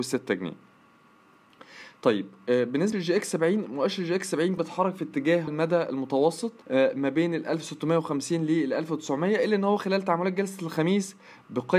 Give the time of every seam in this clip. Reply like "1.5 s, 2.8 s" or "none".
2.9 s, 4.6 s, 5.5 s, 6.6 s